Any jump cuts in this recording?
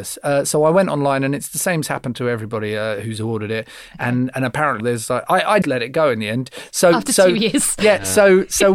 yes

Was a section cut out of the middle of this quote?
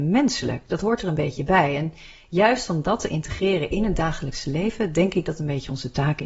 no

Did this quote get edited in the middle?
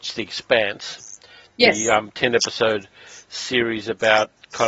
no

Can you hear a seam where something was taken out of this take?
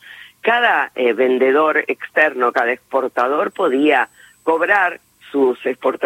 no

